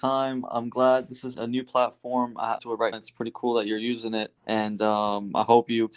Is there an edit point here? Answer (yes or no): yes